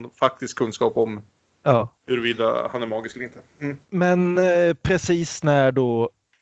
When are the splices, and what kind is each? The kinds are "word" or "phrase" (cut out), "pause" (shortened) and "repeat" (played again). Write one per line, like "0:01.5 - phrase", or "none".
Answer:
none